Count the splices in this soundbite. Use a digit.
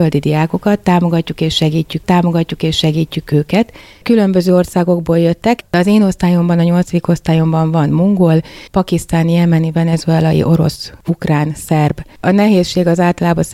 2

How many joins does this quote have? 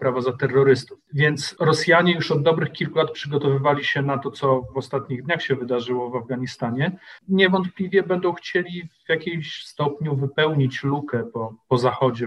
1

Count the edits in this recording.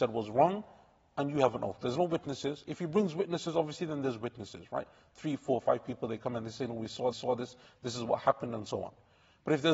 1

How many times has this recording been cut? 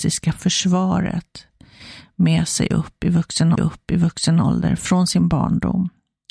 1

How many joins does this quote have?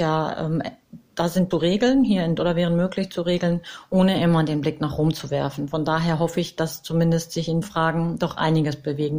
3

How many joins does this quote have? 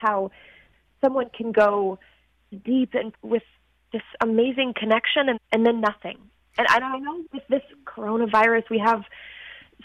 4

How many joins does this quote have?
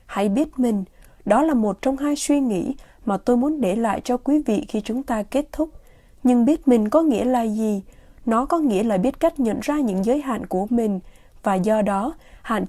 0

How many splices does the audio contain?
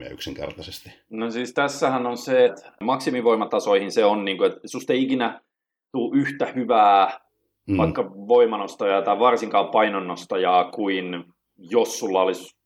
1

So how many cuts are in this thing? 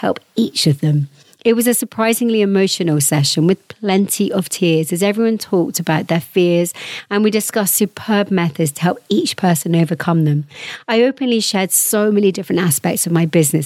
0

